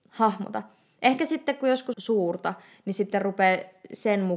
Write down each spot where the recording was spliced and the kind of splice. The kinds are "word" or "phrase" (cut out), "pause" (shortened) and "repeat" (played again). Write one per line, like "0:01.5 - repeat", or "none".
0:01.9 - phrase